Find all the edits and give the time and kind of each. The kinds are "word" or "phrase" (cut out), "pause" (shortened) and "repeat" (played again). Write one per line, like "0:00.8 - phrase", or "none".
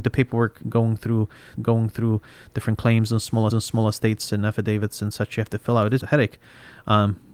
0:01.5 - repeat
0:03.5 - repeat
0:06.0 - word